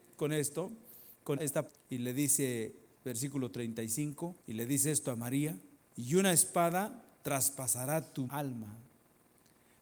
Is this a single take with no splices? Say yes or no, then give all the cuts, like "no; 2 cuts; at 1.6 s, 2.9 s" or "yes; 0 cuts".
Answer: no; 7 cuts; at 1.4 s, 1.7 s, 2.9 s, 4.4 s, 5.8 s, 7.1 s, 8.3 s